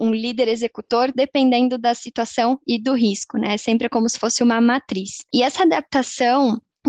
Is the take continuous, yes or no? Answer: yes